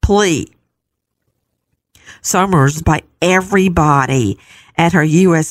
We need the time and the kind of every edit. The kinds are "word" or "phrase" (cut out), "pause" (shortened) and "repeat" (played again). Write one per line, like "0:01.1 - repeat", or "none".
0:02.8 - word